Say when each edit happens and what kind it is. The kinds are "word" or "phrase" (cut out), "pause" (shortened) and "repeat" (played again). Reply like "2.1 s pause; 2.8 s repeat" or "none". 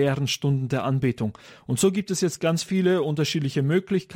none

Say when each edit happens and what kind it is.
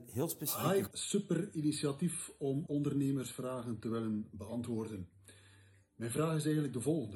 0.9 s word; 2.7 s word

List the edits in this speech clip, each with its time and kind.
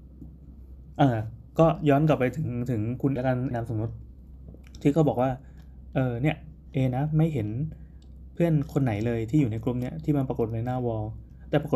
3.2 s word; 3.5 s word

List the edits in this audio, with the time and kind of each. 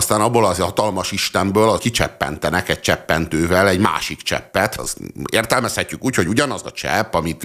1.8 s word; 4.8 s word

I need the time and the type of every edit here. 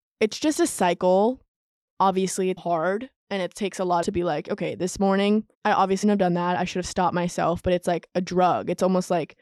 2.6 s word; 3.2 s pause; 4.0 s phrase; 5.5 s pause; 6.0 s word

